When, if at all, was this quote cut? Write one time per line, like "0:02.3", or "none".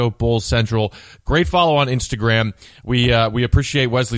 none